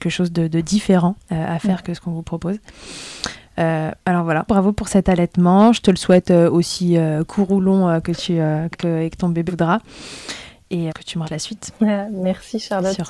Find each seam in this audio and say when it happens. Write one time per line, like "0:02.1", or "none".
0:01.2
0:01.8
0:04.5
0:08.7
0:09.5
0:10.9
0:11.2